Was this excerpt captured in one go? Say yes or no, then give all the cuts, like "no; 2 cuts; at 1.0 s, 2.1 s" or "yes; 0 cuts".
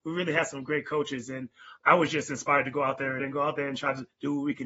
no; 2 cuts; at 1.8 s, 3.2 s